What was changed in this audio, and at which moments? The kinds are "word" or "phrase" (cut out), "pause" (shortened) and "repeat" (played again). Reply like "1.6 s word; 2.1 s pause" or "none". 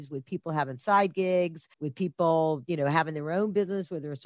1.7 s pause